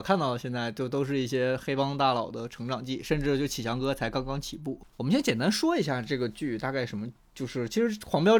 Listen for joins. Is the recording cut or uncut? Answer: cut